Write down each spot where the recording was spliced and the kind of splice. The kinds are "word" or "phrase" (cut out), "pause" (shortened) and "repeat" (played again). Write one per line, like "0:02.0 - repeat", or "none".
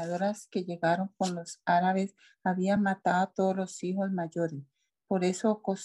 none